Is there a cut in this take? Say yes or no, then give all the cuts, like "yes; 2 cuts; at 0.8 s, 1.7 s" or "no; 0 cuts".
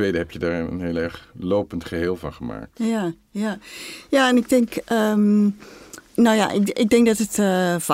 yes; 1 cut; at 6.1 s